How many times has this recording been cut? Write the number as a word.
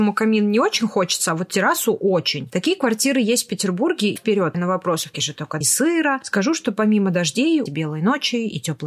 five